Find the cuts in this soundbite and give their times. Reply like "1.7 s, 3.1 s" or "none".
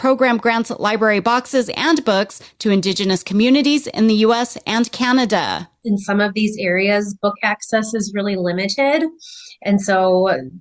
none